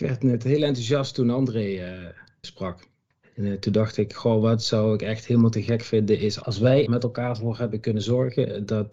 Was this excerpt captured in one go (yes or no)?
no